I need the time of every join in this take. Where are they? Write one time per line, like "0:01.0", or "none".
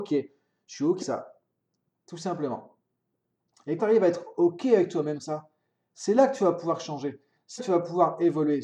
0:01.0
0:03.8
0:05.2
0:07.6